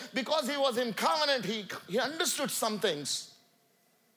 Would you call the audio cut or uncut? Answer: uncut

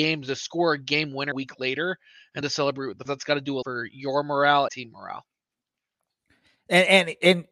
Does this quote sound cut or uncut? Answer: cut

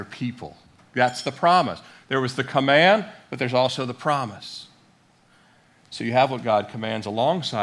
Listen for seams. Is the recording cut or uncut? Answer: uncut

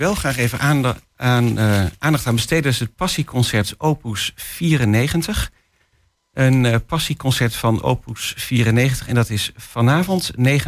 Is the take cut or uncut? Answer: uncut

